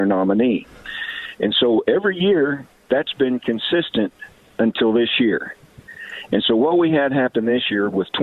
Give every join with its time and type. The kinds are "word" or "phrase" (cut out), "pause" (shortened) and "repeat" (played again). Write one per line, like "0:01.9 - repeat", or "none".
none